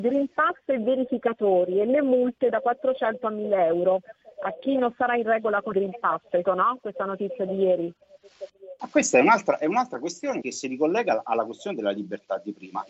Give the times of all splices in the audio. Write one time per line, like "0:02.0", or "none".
0:04.3
0:05.7
0:06.4
0:10.4